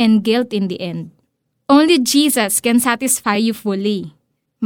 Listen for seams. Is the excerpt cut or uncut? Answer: uncut